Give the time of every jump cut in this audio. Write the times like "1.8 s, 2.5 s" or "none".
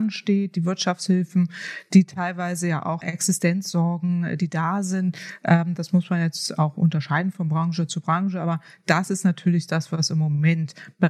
3.0 s